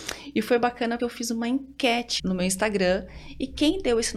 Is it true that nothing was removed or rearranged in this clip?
no; 2 cuts; at 1.0 s, 2.2 s

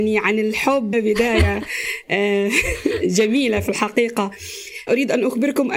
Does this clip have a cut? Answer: yes; 2 cuts; at 0.9 s, 4.9 s

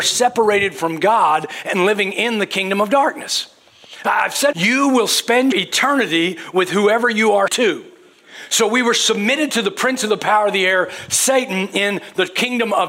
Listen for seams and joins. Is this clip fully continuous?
no; 3 cuts; at 4.5 s, 5.5 s, 7.5 s

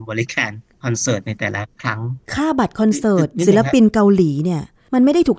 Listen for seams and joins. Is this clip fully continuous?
no; 1 cut; at 2.2 s

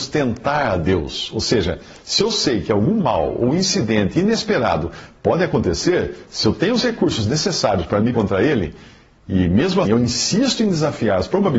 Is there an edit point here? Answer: yes; 2 cuts; at 8.1 s, 9.9 s

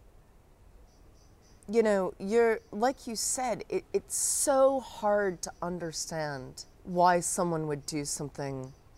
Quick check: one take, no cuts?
no; 1 cut; at 6.7 s

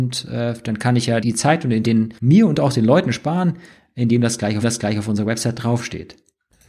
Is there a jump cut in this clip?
yes; 4 cuts; at 1.2 s, 1.8 s, 2.2 s, 4.6 s

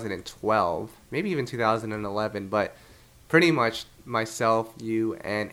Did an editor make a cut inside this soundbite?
no; 0 cuts

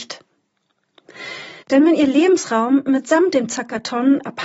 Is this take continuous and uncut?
no; 1 cut; at 1.6 s

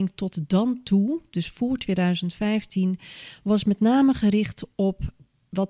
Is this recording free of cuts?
yes; 0 cuts

